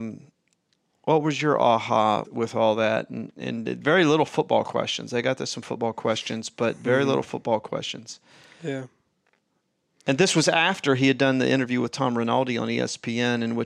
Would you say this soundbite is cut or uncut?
cut